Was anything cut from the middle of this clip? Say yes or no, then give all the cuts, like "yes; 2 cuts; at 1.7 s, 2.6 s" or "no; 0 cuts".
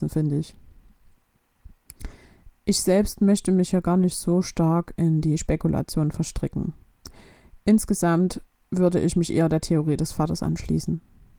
no; 0 cuts